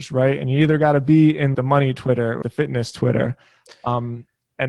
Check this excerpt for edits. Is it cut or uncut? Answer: cut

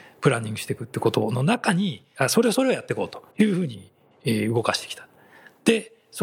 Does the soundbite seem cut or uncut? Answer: cut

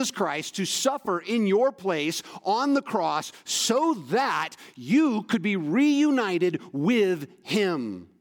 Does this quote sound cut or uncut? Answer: uncut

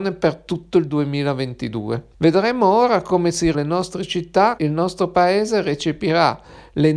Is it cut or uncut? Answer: cut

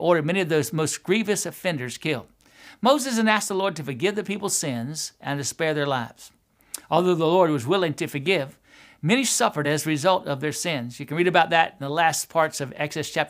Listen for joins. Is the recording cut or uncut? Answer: uncut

